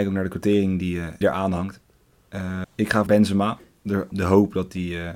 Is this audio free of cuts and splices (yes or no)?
no